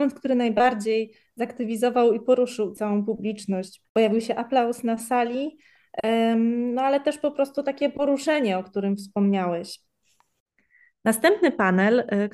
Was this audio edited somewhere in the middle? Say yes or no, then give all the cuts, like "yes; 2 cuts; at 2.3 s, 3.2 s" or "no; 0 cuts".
yes; 1 cut; at 3.8 s